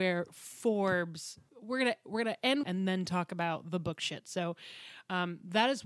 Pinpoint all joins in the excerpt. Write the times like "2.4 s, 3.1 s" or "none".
1.5 s, 2.6 s